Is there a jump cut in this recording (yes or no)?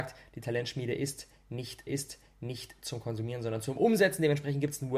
yes